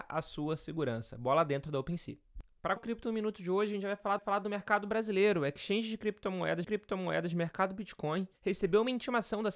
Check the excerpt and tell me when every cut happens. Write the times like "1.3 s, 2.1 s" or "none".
2.8 s, 4.2 s, 6.6 s, 8.4 s